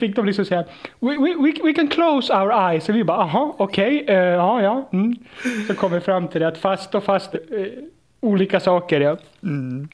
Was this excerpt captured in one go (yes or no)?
no